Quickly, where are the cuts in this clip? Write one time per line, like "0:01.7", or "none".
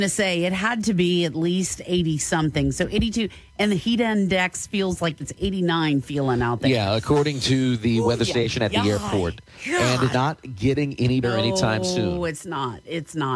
0:05.2
0:10.1
0:11.2